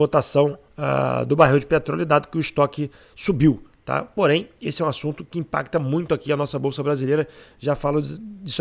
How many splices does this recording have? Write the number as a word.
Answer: zero